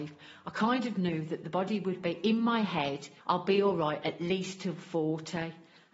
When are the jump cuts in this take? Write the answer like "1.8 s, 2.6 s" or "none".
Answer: 3.2 s